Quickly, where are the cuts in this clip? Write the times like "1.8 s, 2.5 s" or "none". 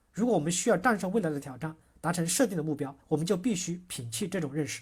3.0 s